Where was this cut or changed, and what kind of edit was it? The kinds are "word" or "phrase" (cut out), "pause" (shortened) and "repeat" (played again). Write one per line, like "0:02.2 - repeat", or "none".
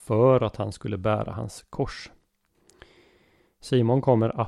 none